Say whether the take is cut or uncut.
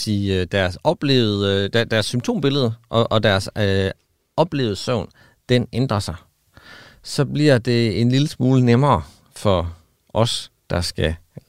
uncut